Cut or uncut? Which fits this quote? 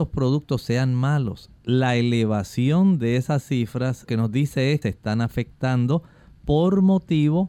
cut